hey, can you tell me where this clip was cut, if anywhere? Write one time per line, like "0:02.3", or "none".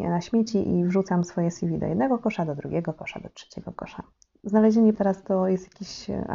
0:04.9